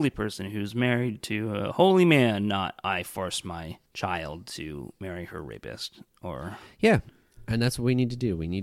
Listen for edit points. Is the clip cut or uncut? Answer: uncut